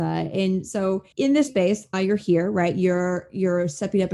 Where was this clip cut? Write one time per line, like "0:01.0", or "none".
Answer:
0:01.1
0:01.5
0:01.9